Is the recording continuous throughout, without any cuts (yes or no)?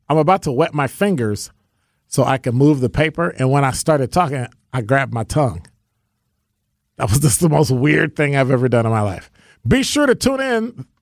yes